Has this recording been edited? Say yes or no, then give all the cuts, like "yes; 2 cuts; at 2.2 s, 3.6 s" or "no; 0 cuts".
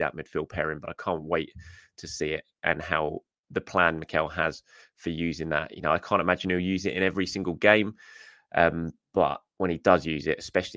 no; 0 cuts